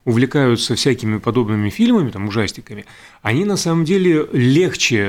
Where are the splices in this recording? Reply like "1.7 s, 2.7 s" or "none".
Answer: none